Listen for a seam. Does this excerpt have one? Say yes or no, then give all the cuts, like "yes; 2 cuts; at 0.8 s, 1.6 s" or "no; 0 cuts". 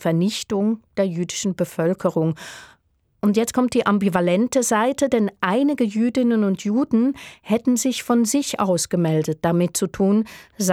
no; 0 cuts